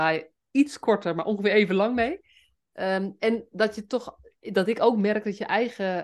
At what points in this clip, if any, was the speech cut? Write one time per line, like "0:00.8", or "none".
none